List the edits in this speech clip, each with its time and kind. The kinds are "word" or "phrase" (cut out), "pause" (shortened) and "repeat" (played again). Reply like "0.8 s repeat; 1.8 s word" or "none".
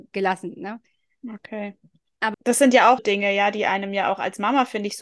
2.3 s word; 3.0 s word

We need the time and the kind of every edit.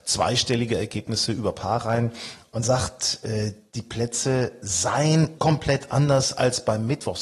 2.6 s word; 5.4 s word

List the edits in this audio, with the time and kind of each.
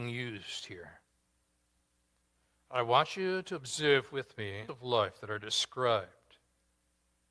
4.7 s phrase

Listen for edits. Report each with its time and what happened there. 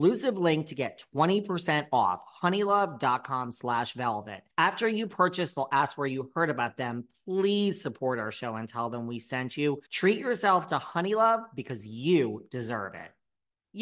4.5 s pause; 9.9 s pause

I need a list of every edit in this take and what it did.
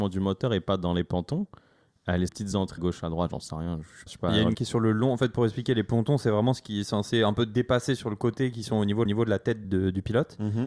2.3 s phrase; 2.8 s word; 4.1 s word; 4.5 s phrase; 9.1 s repeat; 9.6 s word

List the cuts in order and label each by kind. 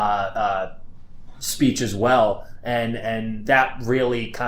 none

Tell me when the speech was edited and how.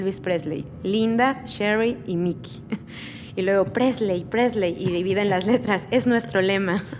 none

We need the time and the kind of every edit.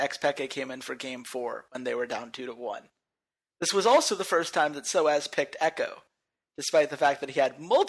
none

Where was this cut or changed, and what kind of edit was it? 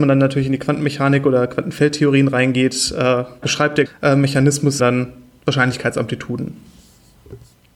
3.4 s word; 3.9 s word; 4.8 s word

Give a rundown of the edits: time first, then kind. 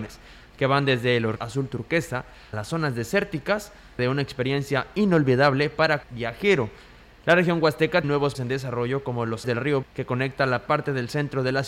1.4 s word; 2.5 s word; 4.0 s word; 6.0 s word; 8.0 s word; 8.3 s word; 9.4 s word; 9.8 s word

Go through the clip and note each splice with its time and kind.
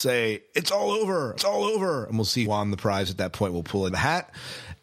1.4 s repeat; 2.5 s word; 3.9 s phrase

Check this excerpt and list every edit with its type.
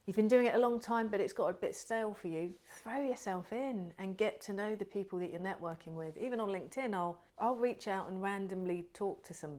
7.3 s pause

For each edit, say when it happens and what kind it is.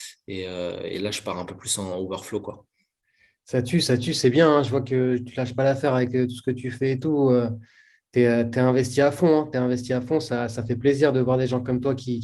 none

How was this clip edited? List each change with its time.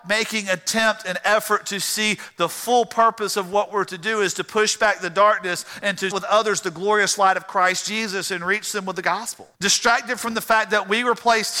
6.1 s word; 9.5 s pause

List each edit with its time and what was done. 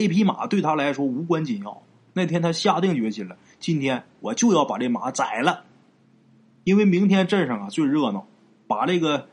none

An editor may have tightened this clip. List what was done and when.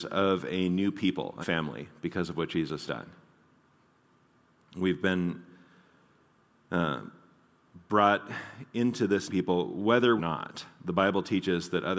1.4 s word; 2.9 s word; 9.3 s word; 10.2 s phrase

